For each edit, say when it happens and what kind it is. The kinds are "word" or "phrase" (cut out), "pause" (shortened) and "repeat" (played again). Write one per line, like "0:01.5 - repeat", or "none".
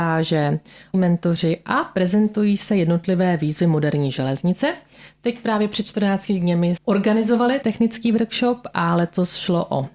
0:00.9 - word
0:06.8 - word
0:07.6 - word